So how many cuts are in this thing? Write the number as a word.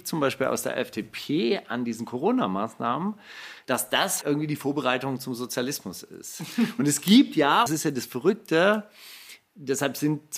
two